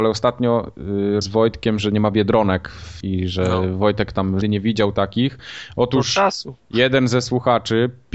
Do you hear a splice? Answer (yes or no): yes